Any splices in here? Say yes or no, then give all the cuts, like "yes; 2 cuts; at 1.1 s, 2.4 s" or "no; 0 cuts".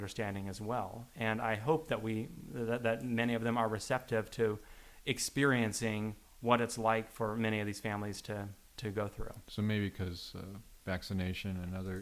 no; 0 cuts